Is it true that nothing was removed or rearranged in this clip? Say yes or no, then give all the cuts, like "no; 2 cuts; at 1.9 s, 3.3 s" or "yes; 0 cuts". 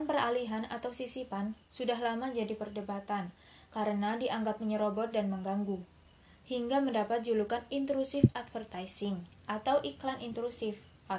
yes; 0 cuts